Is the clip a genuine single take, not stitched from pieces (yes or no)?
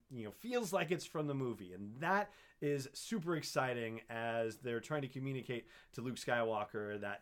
yes